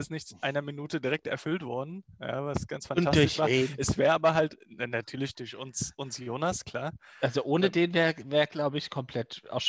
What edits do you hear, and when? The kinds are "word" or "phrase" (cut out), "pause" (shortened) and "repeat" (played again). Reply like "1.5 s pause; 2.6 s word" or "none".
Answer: 2.7 s word